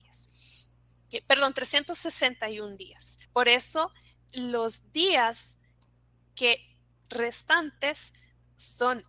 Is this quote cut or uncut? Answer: cut